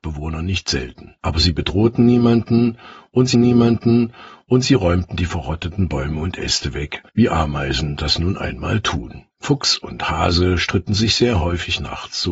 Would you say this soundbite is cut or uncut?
cut